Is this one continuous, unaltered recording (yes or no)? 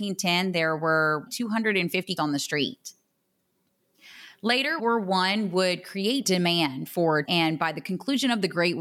no